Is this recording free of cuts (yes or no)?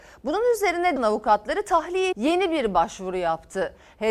no